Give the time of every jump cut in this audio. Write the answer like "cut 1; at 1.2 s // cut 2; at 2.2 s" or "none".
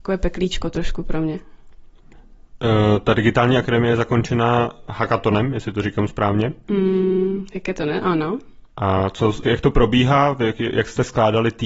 cut 1; at 4.9 s // cut 2; at 9.4 s